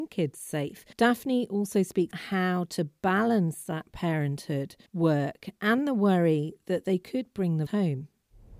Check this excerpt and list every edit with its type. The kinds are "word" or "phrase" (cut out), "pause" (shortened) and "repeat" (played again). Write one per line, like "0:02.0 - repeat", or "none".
0:00.9 - pause
0:02.1 - word
0:04.9 - pause
0:07.7 - word